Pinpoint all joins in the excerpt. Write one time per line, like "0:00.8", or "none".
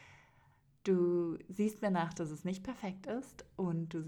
none